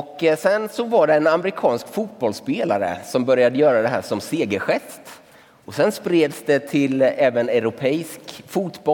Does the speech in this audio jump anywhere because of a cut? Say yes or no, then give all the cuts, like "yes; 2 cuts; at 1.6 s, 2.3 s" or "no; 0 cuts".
no; 0 cuts